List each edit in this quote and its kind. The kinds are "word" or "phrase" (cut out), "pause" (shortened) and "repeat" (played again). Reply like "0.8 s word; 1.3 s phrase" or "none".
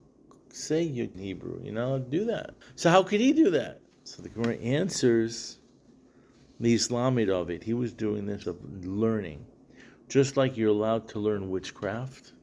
1.1 s phrase; 2.6 s pause; 3.9 s pause; 8.4 s phrase